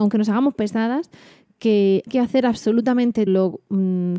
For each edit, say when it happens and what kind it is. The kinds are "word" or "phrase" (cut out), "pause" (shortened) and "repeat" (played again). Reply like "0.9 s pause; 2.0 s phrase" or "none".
2.1 s word; 3.3 s word